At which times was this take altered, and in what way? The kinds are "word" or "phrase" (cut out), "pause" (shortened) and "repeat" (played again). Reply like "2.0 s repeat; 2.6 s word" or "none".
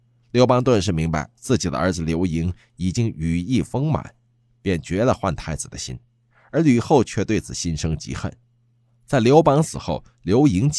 none